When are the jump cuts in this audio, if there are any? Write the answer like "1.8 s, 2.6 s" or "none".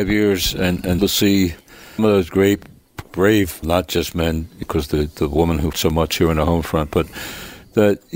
1.0 s, 2.0 s, 3.6 s, 4.6 s, 5.7 s

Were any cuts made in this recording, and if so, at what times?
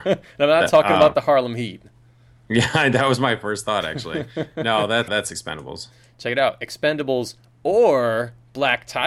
5.1 s

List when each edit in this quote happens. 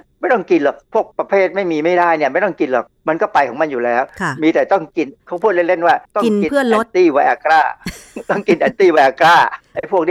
1.1 s, 6.0 s

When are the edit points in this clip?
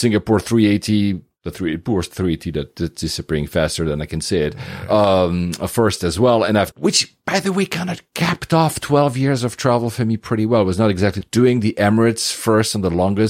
6.7 s, 11.2 s

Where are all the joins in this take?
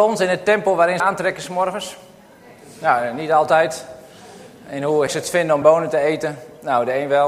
1.0 s, 5.1 s, 5.6 s

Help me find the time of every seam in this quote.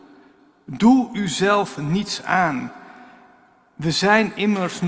none

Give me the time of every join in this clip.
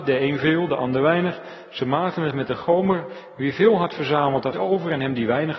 4.5 s

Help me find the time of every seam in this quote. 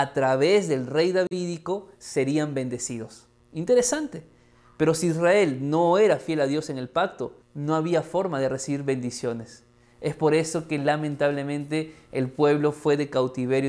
3.4 s, 7.4 s

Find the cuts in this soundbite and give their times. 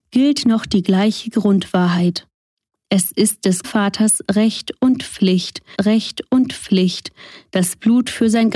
3.6 s, 5.7 s

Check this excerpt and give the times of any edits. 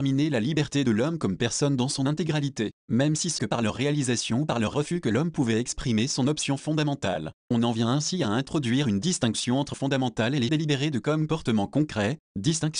3.4 s, 9.7 s, 10.5 s

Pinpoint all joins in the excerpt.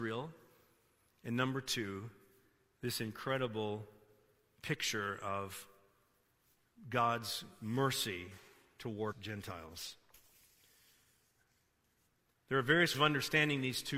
9.1 s, 12.9 s

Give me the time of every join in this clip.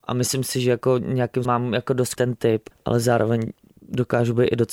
1.4 s, 2.2 s, 2.7 s

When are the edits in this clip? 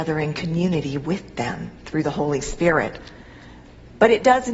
none

